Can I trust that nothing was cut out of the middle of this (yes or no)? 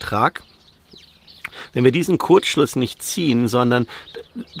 yes